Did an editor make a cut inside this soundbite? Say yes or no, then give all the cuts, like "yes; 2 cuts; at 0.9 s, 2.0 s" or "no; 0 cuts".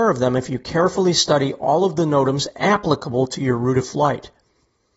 no; 0 cuts